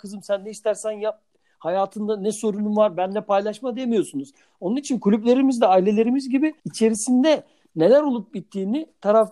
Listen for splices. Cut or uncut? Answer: cut